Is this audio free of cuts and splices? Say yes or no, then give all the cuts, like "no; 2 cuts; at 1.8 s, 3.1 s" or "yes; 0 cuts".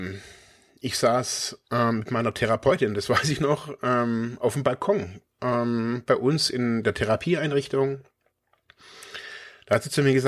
yes; 0 cuts